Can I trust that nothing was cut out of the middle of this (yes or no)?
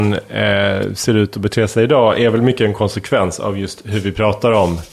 yes